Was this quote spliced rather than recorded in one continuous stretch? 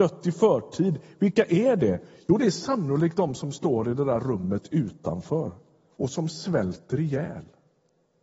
no; 0 cuts

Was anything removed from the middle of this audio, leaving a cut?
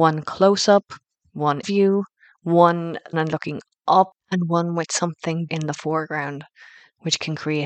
yes; 3 cuts; at 1.6 s, 3.1 s, 5.5 s

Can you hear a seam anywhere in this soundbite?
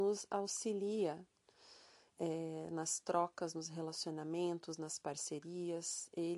no; 0 cuts

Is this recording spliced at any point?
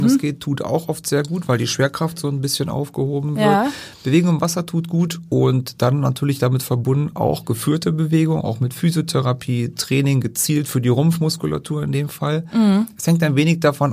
no; 0 cuts

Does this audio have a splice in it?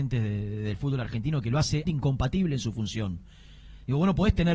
yes; 1 cut; at 1.9 s

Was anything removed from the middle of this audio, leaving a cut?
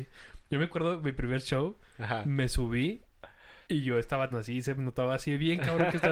yes; 2 cuts; at 3.6 s, 4.3 s

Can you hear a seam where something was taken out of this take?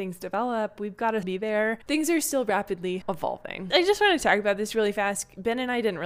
yes; 1 cut; at 1.2 s

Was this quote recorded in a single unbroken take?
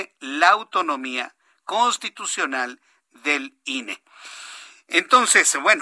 yes; 0 cuts

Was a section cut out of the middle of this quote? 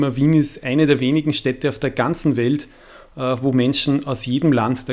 no; 0 cuts

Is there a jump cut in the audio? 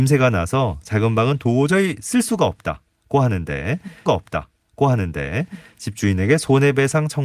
yes; 1 cut; at 4.1 s

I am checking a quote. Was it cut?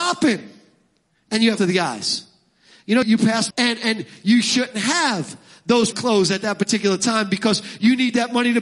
yes; 4 cuts; at 1.6 s, 3.0 s, 3.5 s, 5.9 s

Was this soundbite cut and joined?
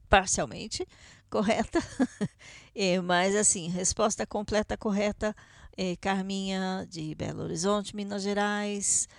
no; 0 cuts

